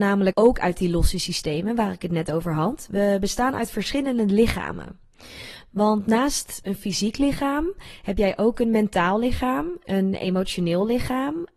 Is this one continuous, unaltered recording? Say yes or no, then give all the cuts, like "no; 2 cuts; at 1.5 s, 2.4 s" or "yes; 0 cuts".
yes; 0 cuts